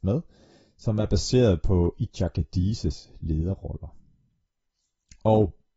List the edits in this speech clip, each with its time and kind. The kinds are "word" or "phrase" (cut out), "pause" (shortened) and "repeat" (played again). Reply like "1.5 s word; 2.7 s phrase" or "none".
none